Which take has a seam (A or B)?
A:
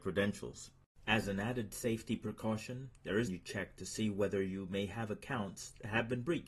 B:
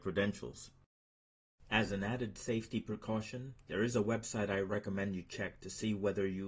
A